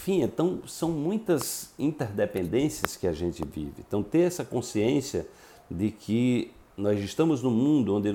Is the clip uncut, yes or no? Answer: yes